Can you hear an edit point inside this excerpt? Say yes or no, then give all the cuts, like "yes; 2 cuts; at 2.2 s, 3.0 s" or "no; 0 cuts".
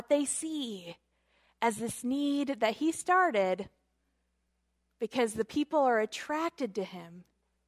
no; 0 cuts